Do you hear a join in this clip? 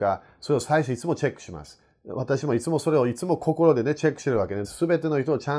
yes; 1 cut; at 4.6 s

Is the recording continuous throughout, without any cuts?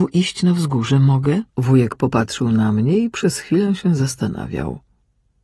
no; 1 cut; at 1.5 s

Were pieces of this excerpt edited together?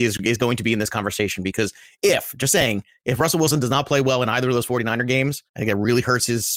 yes; 2 cuts; at 2.0 s, 5.5 s

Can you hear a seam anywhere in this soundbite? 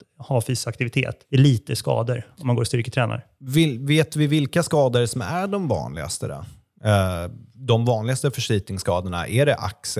yes; 2 cuts; at 1.2 s, 7.5 s

